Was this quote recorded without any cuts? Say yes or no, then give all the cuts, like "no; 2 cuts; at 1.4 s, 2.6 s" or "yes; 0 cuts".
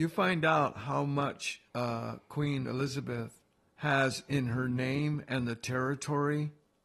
no; 2 cuts; at 1.7 s, 3.7 s